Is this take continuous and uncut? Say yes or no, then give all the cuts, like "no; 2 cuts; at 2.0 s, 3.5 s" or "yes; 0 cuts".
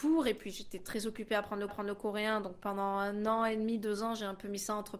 no; 1 cut; at 1.7 s